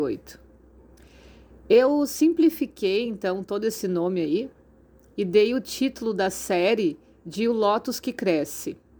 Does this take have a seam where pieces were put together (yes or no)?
no